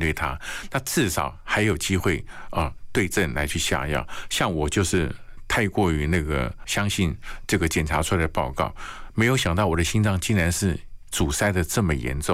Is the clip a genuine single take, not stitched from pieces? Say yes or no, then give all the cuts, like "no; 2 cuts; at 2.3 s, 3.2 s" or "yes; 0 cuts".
yes; 0 cuts